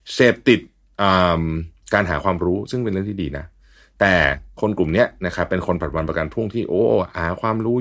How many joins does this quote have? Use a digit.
0